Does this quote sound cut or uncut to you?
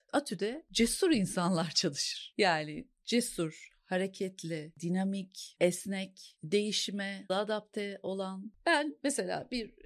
cut